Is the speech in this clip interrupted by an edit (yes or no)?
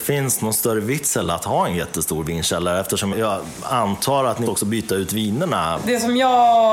yes